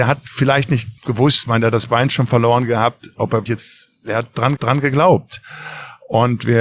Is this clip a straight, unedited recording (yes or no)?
no